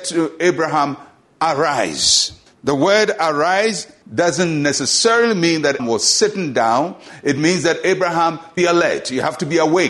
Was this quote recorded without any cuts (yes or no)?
no